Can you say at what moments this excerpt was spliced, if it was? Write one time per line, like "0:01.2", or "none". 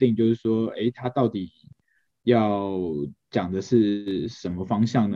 none